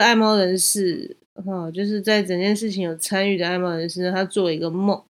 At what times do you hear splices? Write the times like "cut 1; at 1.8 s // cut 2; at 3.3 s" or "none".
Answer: cut 1; at 1.2 s